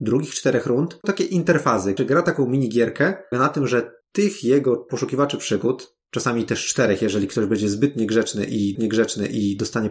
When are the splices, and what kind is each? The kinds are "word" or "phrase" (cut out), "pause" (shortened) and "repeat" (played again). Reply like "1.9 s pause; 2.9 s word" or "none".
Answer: 1.0 s word; 2.0 s phrase; 3.3 s phrase; 4.0 s pause; 4.9 s word; 6.0 s pause; 8.7 s repeat